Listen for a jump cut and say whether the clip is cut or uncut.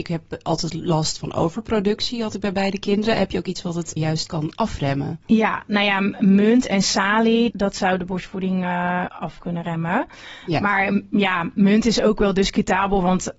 cut